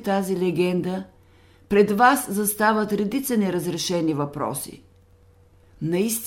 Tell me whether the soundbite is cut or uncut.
uncut